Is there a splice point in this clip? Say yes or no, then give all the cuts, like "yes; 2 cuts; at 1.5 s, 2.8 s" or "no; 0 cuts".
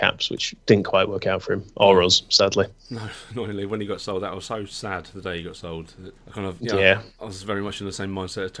yes; 1 cut; at 6.2 s